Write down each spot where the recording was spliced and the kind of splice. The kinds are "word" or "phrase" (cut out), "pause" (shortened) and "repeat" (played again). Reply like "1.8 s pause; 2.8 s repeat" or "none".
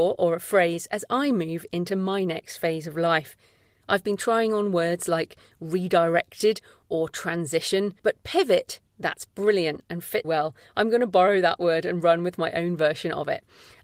8.0 s pause; 10.2 s word